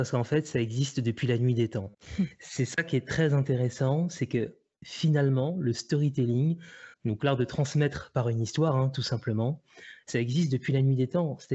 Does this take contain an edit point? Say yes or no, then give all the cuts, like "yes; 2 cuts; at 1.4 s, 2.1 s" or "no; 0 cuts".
yes; 2 cuts; at 1.9 s, 6.9 s